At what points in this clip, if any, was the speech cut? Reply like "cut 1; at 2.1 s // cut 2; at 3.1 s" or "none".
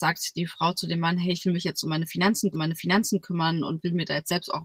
cut 1; at 2.5 s